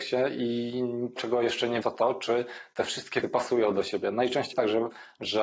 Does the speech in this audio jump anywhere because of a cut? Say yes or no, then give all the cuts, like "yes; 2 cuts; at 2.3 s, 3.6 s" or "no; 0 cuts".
yes; 4 cuts; at 1.2 s, 1.8 s, 3.2 s, 4.5 s